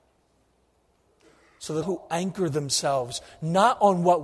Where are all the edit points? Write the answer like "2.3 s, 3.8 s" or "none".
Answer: 1.8 s